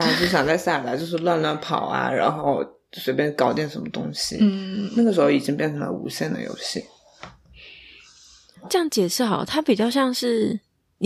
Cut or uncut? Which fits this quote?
uncut